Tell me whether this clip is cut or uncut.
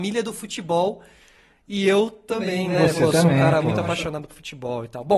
uncut